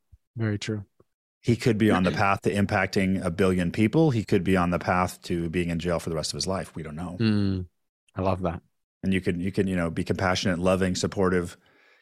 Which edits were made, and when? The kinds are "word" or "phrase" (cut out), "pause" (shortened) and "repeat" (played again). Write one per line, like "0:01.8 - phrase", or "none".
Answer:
none